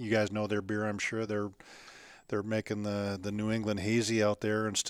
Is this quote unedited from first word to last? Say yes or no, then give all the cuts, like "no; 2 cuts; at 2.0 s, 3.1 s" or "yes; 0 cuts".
yes; 0 cuts